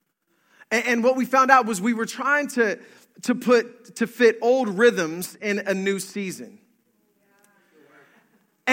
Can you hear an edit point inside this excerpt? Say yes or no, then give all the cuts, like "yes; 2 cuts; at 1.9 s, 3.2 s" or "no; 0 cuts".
no; 0 cuts